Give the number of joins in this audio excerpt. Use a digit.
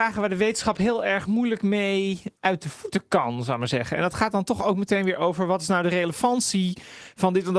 1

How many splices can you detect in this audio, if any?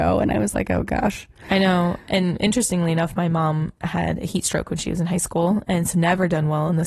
1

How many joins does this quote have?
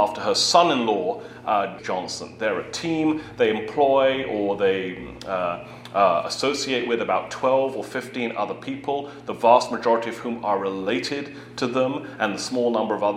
1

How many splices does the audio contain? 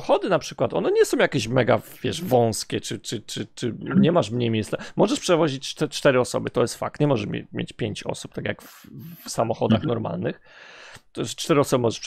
0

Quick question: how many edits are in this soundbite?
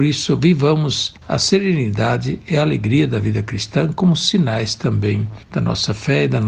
1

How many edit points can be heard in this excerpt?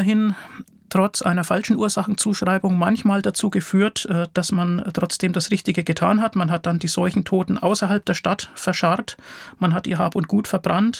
0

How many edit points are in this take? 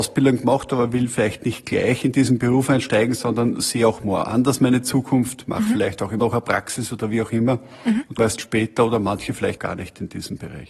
3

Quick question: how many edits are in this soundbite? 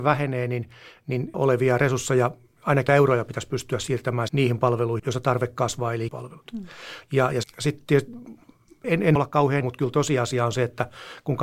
9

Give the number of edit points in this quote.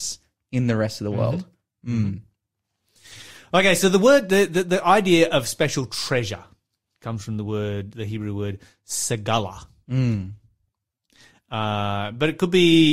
0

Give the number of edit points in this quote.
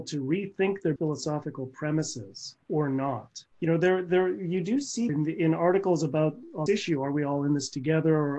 5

